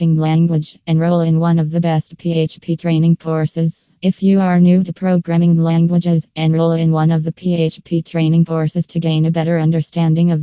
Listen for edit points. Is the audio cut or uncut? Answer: cut